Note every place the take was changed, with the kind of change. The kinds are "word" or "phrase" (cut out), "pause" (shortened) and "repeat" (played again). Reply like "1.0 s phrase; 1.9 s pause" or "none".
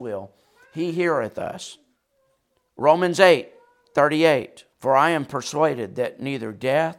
2.0 s pause; 4.7 s pause